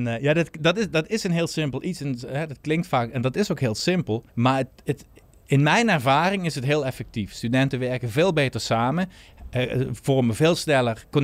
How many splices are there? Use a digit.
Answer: 1